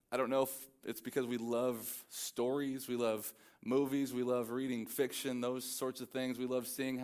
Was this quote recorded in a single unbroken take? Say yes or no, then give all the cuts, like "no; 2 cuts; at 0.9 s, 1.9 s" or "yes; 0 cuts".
yes; 0 cuts